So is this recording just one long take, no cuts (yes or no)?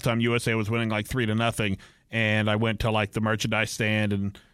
yes